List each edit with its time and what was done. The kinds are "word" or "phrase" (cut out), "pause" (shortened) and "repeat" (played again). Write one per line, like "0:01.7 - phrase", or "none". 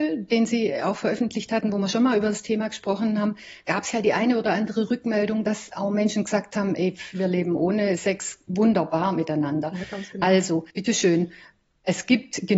0:10.7 - pause